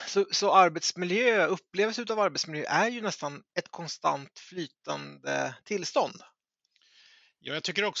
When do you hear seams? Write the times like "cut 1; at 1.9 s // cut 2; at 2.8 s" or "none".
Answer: cut 1; at 3.5 s